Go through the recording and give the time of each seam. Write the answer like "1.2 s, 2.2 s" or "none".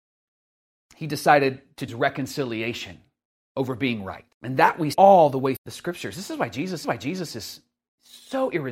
1.9 s, 3.3 s, 4.3 s, 4.9 s, 5.6 s, 6.8 s